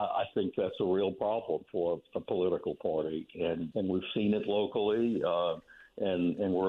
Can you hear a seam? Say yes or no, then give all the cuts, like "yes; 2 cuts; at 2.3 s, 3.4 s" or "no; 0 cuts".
yes; 1 cut; at 3.7 s